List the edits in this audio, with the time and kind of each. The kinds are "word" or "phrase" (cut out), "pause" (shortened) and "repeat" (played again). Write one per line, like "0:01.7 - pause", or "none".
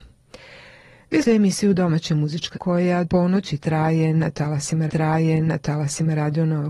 0:01.2 - word
0:02.5 - word
0:03.0 - word
0:04.9 - repeat